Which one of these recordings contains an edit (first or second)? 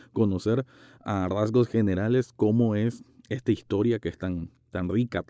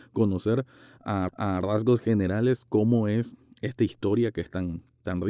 second